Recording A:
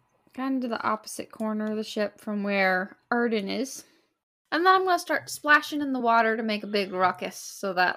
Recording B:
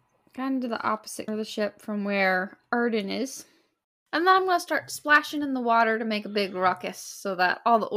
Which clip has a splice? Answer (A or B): B